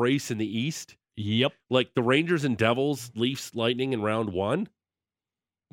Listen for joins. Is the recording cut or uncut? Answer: uncut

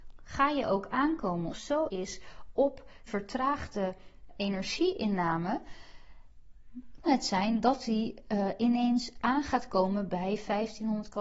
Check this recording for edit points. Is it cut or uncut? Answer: cut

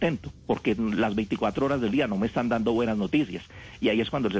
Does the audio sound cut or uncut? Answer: uncut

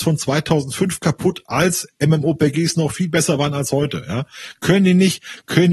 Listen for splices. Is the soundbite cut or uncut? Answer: uncut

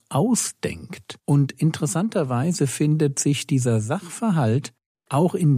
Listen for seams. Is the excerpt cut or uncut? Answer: cut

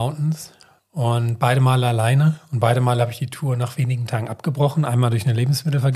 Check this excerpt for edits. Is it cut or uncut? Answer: uncut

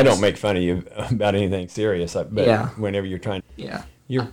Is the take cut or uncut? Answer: cut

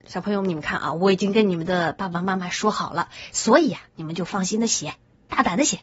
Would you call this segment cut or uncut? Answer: uncut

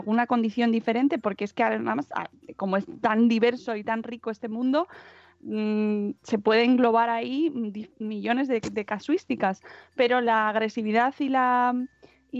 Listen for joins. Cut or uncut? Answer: uncut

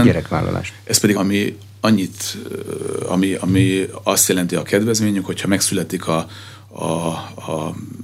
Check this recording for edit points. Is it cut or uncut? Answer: cut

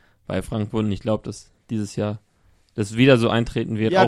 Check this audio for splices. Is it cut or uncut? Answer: uncut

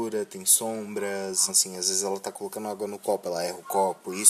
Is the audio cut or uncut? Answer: cut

